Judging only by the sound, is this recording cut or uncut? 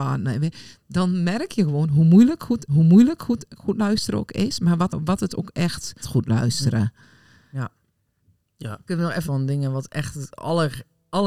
cut